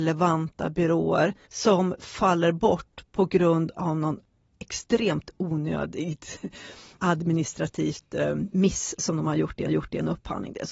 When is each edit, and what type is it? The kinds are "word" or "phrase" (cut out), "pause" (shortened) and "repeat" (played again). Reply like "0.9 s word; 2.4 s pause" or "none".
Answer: 9.7 s repeat